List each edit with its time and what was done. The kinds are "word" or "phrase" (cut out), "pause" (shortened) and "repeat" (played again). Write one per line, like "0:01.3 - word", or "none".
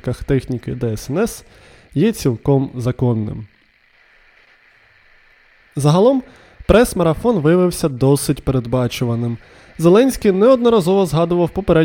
none